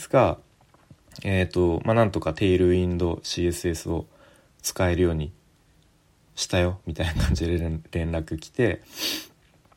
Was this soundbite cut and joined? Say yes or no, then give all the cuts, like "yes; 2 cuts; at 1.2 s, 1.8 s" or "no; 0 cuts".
no; 0 cuts